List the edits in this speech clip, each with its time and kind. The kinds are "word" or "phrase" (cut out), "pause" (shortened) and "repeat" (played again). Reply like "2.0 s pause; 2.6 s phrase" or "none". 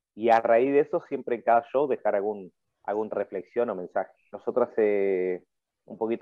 3.1 s phrase